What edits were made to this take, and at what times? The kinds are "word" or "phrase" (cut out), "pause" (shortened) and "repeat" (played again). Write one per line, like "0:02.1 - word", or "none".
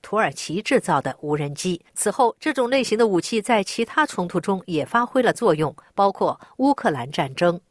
0:01.9 - pause